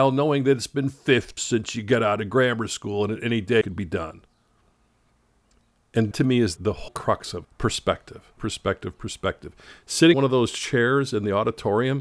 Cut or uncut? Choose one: cut